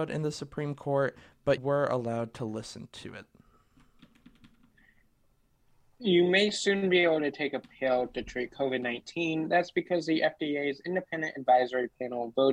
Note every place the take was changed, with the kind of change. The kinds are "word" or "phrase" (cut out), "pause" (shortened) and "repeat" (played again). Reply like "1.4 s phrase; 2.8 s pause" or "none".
1.6 s word